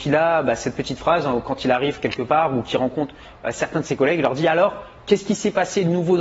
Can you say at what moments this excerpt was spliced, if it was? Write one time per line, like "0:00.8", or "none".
none